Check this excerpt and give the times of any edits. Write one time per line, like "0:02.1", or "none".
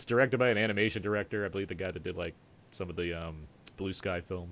none